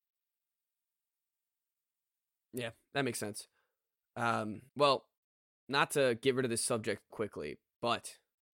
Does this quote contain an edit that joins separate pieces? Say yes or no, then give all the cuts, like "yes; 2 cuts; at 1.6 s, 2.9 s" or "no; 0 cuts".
yes; 2 cuts; at 4.7 s, 7.1 s